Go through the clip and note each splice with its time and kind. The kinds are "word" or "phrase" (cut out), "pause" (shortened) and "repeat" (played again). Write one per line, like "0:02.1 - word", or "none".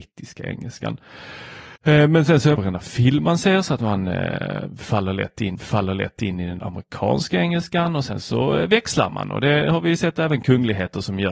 0:01.8 - pause
0:02.5 - phrase
0:05.5 - repeat
0:06.6 - word

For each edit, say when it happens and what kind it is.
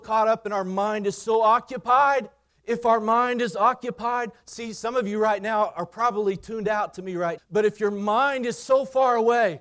0:02.5 - pause
0:07.4 - word

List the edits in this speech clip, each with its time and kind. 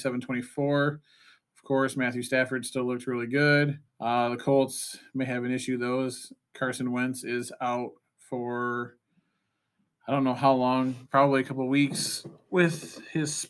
0:03.9 - pause

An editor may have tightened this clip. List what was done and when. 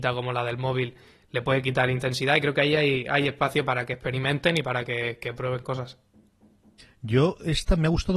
none

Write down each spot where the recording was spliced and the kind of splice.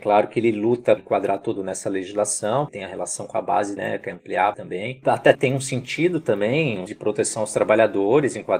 0:01.0 - word
0:01.6 - word
0:02.7 - word
0:03.8 - word
0:04.5 - word
0:05.0 - word
0:05.3 - word
0:06.9 - word

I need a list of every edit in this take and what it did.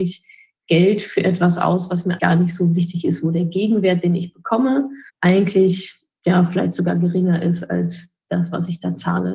0:02.2 - word
0:05.1 - pause

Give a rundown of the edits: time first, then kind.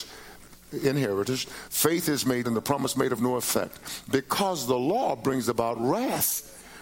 0:02.4 - word

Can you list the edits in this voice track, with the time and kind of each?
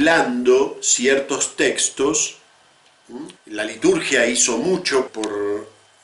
0:03.4 - pause
0:05.1 - word

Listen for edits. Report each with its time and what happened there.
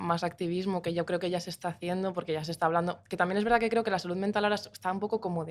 none

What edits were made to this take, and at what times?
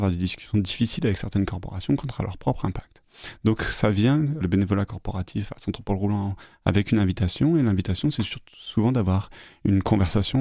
0:04.4 - word

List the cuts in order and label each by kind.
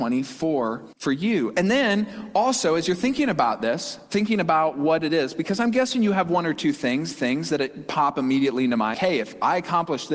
0:00.9 - pause
0:07.1 - repeat
0:08.9 - word

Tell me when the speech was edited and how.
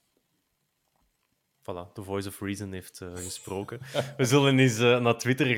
none

